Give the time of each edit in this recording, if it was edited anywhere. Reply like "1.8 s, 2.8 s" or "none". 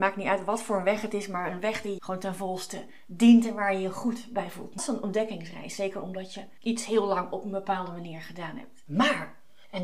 2.0 s, 4.8 s